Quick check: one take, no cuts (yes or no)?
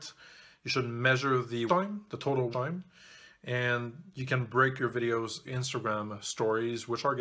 no